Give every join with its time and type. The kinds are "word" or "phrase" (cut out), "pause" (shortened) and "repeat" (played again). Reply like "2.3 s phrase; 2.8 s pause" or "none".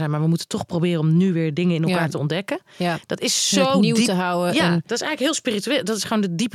none